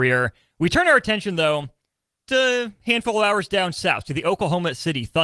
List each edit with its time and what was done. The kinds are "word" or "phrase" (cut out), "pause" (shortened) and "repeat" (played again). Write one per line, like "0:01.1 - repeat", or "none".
0:02.3 - word